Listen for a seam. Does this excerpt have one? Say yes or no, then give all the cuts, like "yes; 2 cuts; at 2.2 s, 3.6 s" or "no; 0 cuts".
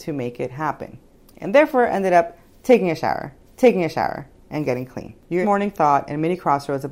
yes; 3 cuts; at 1.2 s, 3.4 s, 5.4 s